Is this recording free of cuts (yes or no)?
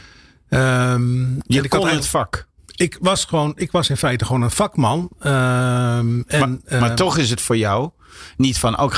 yes